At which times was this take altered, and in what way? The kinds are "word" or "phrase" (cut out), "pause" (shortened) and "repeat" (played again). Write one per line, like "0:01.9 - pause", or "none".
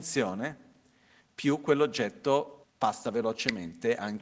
0:02.6 - pause